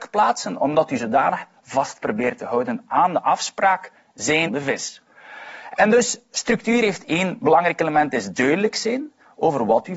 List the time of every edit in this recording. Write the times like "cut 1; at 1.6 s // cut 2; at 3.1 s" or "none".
cut 1; at 4.5 s